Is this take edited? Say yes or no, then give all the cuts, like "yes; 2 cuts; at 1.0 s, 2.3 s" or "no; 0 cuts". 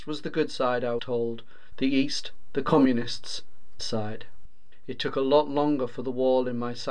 yes; 2 cuts; at 1.0 s, 3.8 s